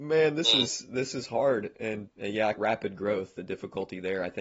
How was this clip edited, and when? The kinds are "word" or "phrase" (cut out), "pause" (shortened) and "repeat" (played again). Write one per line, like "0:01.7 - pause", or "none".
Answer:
0:02.1 - word
0:02.6 - phrase